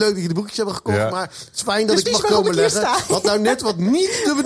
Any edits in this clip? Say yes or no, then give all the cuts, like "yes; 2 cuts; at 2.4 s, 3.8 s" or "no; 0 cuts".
yes; 1 cut; at 2.0 s